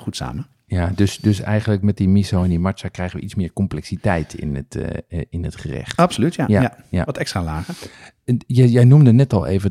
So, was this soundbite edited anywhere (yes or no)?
no